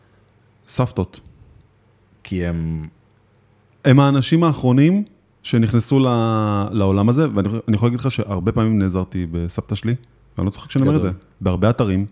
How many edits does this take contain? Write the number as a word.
zero